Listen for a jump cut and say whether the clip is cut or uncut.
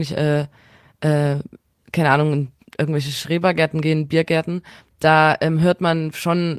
uncut